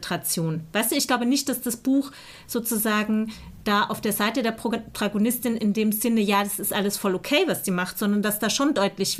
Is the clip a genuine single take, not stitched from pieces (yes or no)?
no